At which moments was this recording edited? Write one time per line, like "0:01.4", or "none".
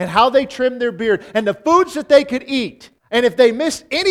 0:03.0